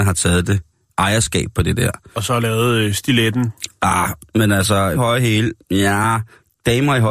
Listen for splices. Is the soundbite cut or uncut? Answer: cut